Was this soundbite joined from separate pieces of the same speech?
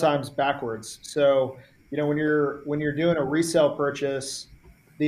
no; 0 cuts

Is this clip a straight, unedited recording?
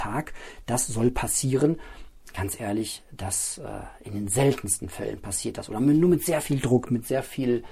yes; 0 cuts

